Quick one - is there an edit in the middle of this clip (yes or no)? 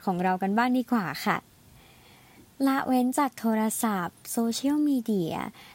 no